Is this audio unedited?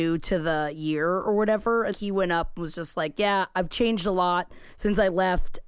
no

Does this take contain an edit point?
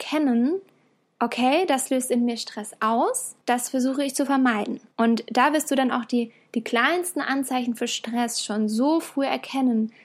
yes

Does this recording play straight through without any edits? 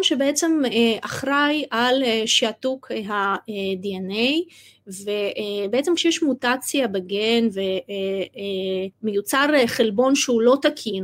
no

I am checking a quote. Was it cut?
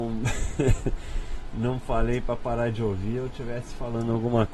no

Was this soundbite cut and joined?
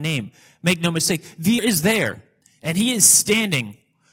yes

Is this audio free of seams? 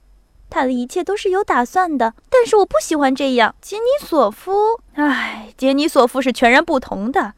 no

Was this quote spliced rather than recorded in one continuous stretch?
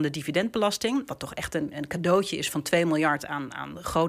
no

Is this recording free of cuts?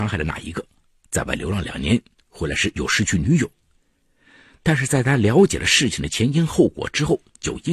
yes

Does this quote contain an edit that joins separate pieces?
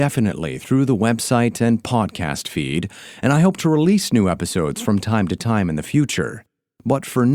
no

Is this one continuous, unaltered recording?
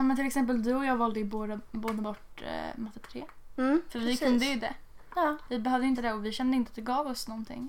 no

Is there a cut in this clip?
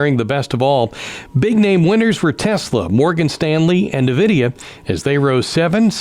no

